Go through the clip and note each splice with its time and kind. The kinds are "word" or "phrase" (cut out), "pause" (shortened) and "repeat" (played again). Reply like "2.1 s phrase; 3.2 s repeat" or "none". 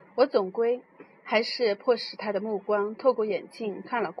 1.1 s pause